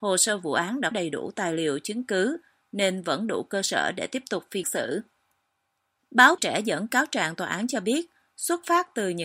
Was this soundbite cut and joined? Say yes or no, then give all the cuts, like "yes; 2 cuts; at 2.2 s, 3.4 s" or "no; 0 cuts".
yes; 3 cuts; at 0.9 s, 4.6 s, 6.4 s